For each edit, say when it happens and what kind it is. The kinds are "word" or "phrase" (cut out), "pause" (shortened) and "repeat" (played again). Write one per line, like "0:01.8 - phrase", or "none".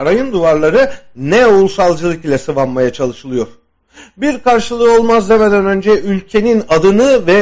none